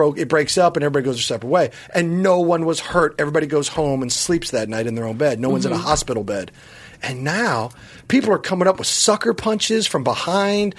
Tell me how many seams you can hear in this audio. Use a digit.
0